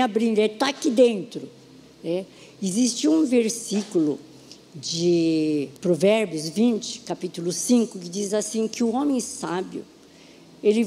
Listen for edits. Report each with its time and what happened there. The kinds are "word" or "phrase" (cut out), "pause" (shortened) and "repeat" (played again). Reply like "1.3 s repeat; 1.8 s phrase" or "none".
5.8 s pause